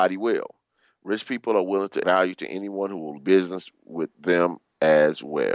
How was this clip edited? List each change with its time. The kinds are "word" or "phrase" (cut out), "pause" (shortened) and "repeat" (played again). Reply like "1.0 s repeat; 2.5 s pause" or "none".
2.0 s phrase; 3.2 s phrase